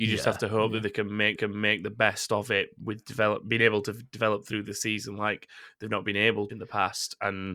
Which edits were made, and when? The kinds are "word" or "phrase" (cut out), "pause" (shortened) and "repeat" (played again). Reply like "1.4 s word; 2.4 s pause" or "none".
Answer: 1.4 s repeat; 6.5 s phrase